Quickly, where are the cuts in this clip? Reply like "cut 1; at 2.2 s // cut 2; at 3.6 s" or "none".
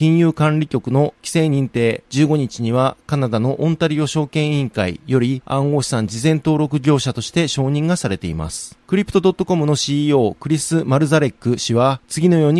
none